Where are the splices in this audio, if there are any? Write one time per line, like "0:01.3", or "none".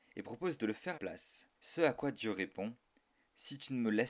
0:00.9
0:01.5